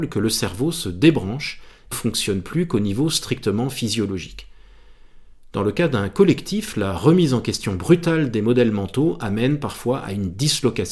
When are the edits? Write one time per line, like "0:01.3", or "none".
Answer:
0:01.9